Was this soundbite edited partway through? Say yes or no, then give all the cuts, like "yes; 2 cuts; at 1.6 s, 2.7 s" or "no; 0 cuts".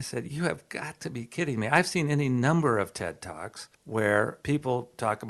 yes; 1 cut; at 3.7 s